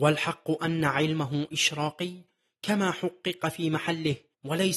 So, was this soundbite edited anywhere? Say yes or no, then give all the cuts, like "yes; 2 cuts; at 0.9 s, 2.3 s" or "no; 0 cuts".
no; 0 cuts